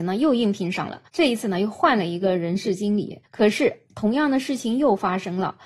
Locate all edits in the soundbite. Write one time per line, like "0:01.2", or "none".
0:01.1
0:03.3